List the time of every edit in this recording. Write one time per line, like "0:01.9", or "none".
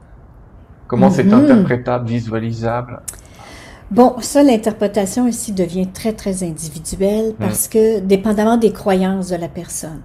none